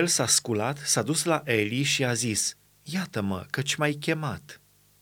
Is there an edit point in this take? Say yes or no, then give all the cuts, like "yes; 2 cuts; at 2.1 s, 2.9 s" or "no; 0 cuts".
yes; 1 cut; at 2.7 s